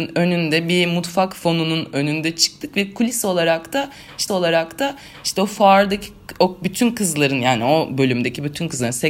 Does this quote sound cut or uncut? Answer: cut